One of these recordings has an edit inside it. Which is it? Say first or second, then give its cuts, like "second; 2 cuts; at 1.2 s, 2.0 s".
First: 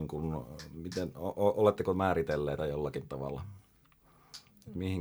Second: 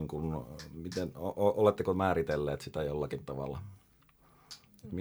first; 1 cut; at 2.6 s